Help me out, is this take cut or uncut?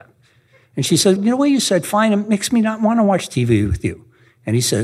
cut